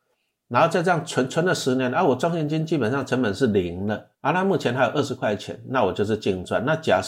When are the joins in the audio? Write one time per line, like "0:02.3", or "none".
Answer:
0:04.1